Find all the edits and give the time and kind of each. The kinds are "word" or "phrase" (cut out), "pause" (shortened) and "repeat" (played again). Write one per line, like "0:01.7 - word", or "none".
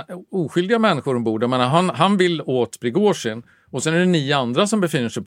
none